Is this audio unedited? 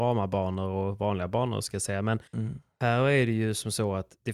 no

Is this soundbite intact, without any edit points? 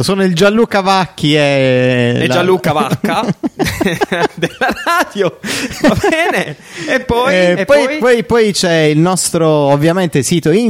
yes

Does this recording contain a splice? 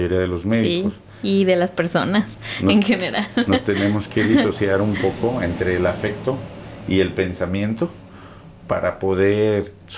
no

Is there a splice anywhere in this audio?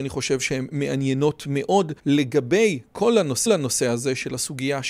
yes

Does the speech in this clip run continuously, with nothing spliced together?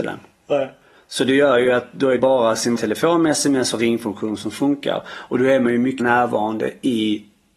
no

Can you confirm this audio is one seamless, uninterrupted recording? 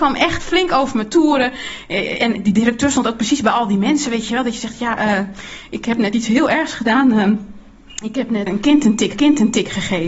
no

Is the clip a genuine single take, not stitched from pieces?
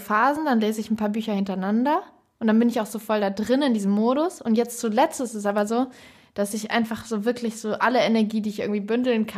yes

